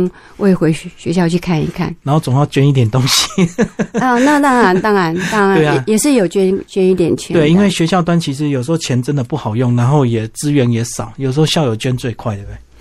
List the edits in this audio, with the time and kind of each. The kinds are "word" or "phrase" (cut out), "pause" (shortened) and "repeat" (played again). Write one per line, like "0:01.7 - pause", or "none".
0:02.0 - pause

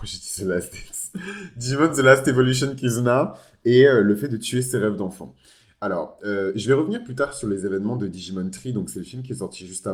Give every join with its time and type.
none

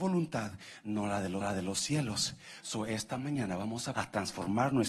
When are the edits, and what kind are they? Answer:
0:01.4 - repeat
0:03.9 - phrase

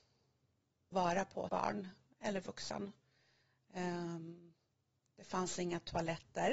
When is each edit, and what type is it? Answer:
0:00.9 - phrase
0:01.5 - word

